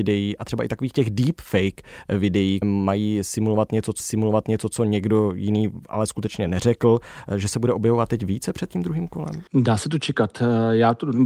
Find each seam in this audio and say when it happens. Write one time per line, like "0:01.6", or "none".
0:02.6
0:04.0
0:09.5